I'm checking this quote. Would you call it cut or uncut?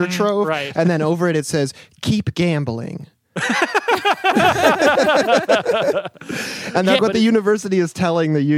cut